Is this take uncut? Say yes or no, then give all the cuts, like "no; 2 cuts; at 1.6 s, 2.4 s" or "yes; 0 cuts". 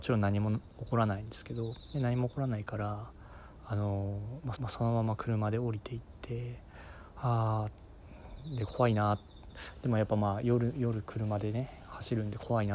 no; 1 cut; at 4.6 s